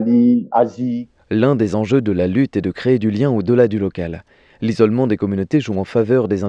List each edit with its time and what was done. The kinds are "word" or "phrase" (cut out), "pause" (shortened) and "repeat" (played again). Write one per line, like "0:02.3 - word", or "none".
none